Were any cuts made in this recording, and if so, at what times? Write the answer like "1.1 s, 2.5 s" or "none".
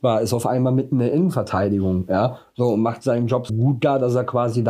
3.5 s